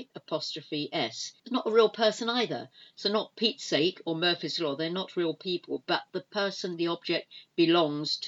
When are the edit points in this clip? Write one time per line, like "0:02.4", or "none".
0:01.4